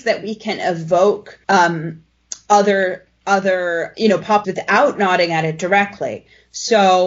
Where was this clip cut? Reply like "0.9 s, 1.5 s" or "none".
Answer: 1.4 s, 3.9 s, 4.4 s